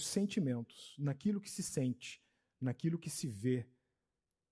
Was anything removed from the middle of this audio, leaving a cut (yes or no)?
no